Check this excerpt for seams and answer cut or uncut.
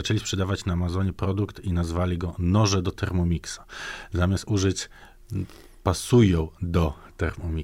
uncut